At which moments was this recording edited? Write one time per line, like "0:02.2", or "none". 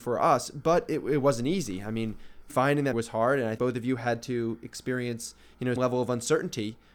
0:02.5
0:02.9
0:03.6
0:05.8